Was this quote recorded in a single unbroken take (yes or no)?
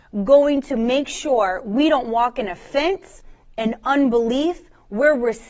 yes